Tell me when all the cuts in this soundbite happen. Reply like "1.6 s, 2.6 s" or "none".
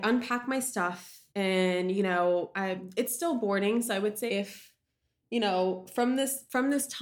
1.3 s, 4.3 s